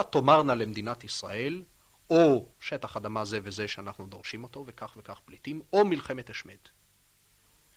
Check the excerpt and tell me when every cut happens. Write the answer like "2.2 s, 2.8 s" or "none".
2.5 s